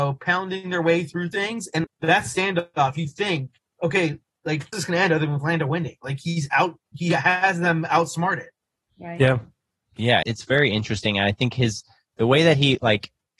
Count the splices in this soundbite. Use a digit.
4